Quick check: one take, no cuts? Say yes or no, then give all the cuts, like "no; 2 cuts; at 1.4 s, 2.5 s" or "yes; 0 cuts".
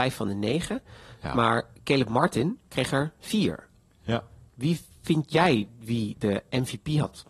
yes; 0 cuts